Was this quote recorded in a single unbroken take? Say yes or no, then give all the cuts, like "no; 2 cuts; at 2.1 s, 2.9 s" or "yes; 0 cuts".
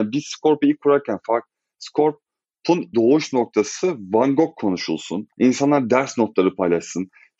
no; 2 cuts; at 2.9 s, 5.3 s